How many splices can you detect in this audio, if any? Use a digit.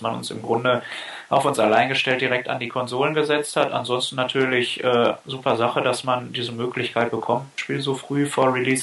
0